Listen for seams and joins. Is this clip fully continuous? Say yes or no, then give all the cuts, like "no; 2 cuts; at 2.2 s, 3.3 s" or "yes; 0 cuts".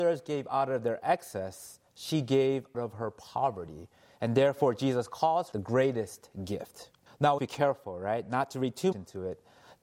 no; 6 cuts; at 1.9 s, 2.7 s, 5.5 s, 7.1 s, 7.4 s, 8.9 s